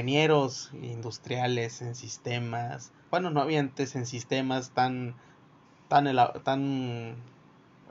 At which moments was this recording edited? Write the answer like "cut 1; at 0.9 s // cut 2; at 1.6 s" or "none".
none